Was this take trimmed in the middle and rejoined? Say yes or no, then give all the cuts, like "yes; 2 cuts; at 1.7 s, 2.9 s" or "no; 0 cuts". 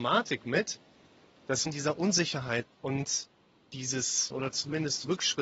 yes; 3 cuts; at 1.7 s, 2.6 s, 4.3 s